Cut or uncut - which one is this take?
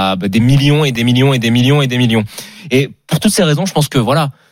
uncut